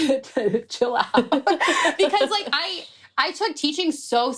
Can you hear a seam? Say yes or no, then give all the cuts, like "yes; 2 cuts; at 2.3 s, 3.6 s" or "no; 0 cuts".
no; 0 cuts